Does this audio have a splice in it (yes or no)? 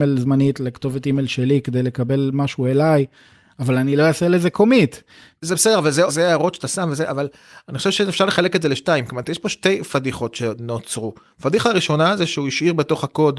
yes